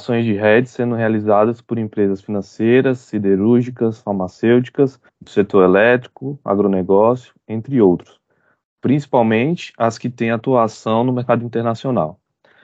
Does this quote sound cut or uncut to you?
cut